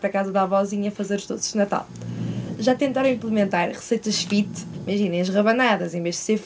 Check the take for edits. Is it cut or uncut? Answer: uncut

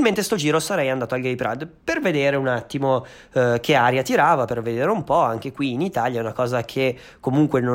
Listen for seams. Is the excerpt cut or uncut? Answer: uncut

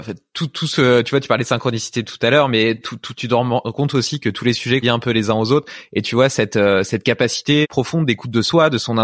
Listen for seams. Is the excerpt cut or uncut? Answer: cut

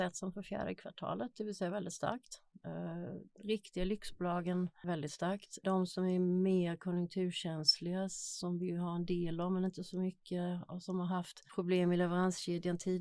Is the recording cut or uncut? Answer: uncut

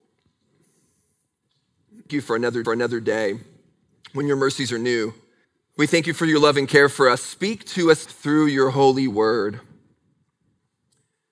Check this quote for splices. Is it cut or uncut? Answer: cut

